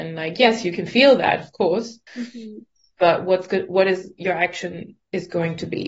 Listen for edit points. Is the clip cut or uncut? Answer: cut